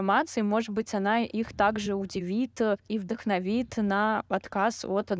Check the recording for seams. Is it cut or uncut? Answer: uncut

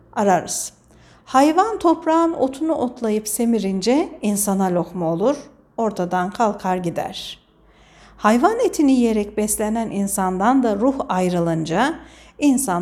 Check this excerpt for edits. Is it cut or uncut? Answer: uncut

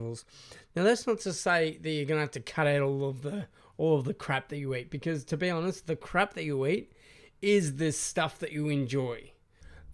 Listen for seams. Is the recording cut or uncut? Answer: uncut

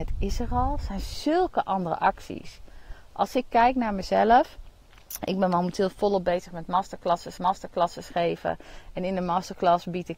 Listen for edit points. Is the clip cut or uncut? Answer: cut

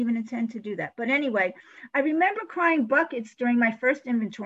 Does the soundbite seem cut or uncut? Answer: uncut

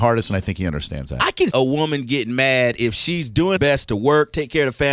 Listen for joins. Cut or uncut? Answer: cut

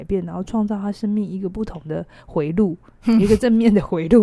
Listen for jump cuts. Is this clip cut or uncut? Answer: uncut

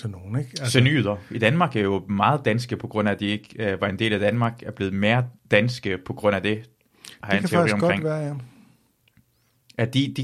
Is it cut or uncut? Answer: cut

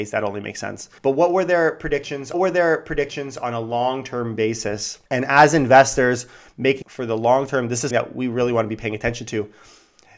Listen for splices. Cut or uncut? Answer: cut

